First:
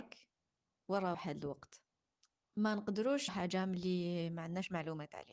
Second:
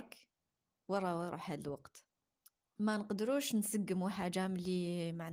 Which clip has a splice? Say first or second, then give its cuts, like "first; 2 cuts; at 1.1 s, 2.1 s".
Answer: first; 2 cuts; at 1.1 s, 3.3 s